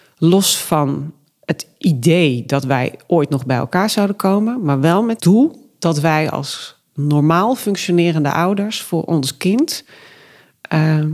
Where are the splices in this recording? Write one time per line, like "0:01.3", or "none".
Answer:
0:05.2

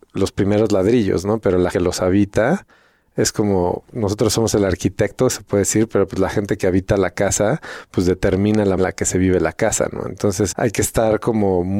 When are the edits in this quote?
0:01.7
0:08.8
0:10.5

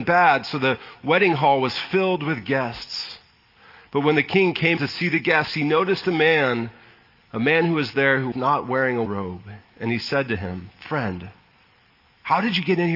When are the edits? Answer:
0:04.8
0:08.3
0:09.1

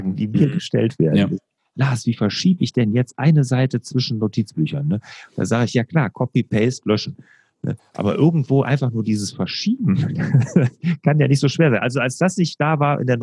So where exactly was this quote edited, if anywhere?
none

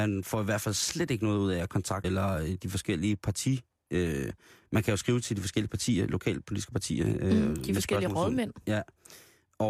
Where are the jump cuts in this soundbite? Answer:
0:02.0

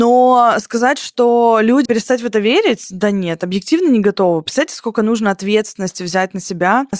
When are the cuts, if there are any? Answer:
0:01.9

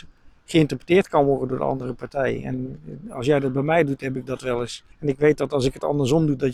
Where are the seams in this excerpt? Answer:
0:04.9

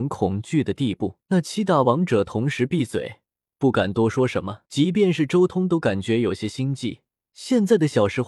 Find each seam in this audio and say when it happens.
0:01.2
0:04.7
0:07.1

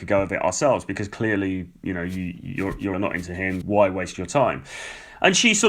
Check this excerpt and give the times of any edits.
0:02.9
0:03.6

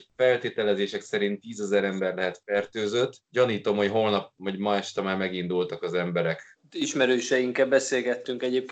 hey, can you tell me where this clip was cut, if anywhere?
none

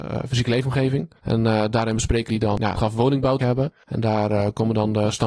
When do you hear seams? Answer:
0:01.2
0:02.3
0:02.8
0:03.4

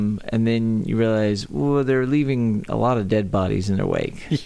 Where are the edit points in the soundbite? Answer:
none

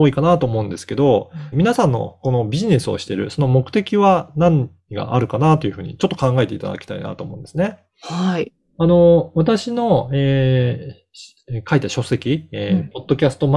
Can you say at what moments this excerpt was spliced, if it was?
0:01.5

